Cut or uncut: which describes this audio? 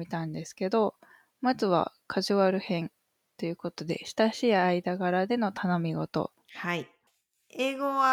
uncut